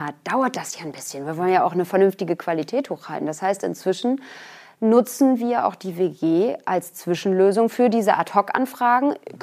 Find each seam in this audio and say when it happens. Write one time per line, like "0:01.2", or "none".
none